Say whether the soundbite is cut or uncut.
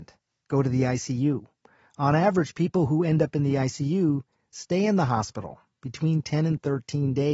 uncut